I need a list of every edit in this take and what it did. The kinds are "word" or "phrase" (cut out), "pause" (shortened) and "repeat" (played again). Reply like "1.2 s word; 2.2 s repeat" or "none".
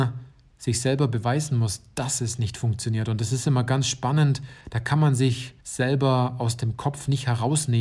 4.6 s pause; 5.6 s pause